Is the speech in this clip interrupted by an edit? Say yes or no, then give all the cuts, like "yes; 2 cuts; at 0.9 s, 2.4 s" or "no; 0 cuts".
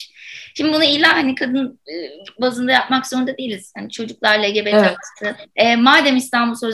yes; 1 cut; at 5.5 s